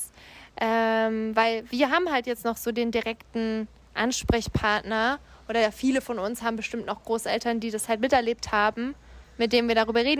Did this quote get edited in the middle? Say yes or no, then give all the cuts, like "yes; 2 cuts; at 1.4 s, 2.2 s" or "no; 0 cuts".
no; 0 cuts